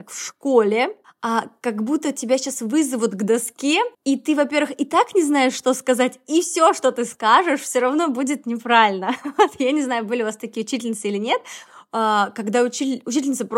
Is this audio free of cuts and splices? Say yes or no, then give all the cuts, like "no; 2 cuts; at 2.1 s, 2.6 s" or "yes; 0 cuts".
no; 2 cuts; at 1.0 s, 3.9 s